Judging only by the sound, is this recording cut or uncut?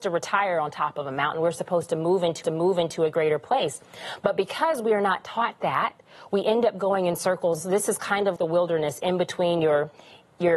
cut